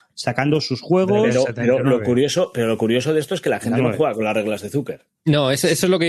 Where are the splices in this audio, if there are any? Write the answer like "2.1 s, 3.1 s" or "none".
none